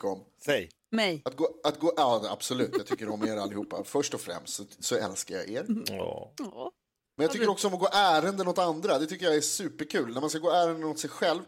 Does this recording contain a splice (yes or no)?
no